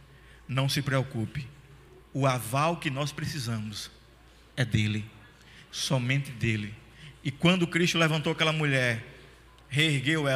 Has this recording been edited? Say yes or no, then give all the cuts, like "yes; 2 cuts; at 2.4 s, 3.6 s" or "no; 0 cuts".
no; 0 cuts